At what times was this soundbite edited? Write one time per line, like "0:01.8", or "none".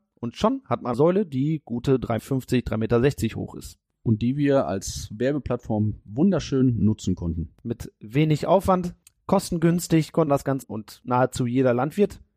0:00.9
0:02.2
0:09.0
0:10.3
0:10.6